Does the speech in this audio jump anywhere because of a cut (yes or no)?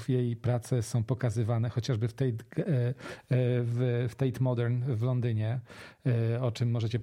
no